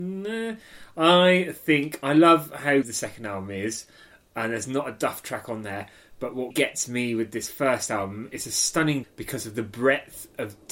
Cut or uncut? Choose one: cut